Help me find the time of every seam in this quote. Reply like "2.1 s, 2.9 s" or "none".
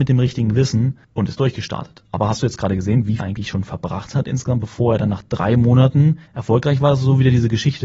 1.0 s, 3.2 s, 6.3 s